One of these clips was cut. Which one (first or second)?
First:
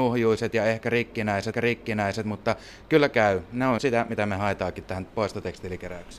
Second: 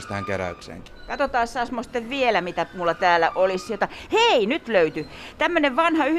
first